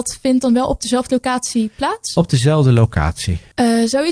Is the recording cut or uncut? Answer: uncut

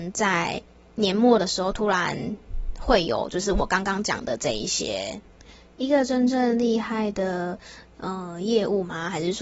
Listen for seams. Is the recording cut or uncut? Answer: uncut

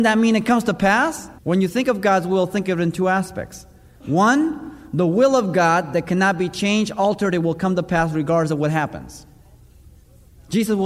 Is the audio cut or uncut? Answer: cut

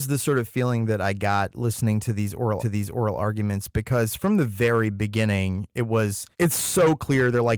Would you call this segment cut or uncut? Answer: cut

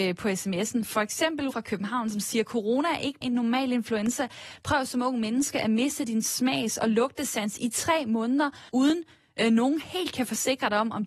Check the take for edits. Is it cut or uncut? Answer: cut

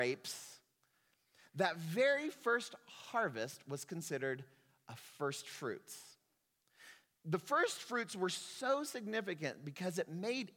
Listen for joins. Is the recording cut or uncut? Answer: uncut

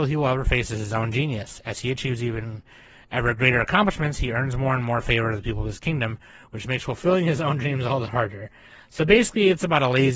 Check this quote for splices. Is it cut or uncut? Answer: uncut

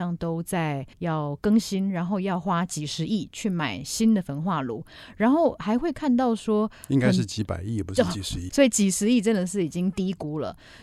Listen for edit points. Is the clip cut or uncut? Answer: cut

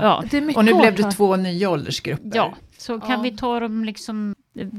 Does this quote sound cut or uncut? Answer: uncut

